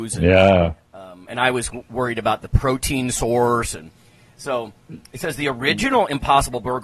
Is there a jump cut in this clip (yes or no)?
no